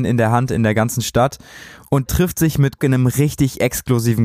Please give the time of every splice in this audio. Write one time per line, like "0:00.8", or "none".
0:02.1
0:02.8